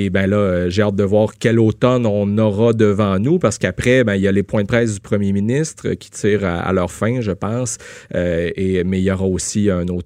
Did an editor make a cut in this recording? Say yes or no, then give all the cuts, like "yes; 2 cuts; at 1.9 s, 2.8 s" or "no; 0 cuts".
no; 0 cuts